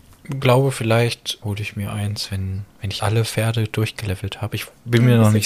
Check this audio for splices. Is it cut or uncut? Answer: cut